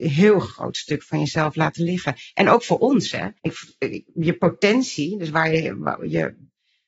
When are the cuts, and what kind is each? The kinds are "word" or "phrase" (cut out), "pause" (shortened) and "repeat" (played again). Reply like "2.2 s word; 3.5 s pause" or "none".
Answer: 3.4 s pause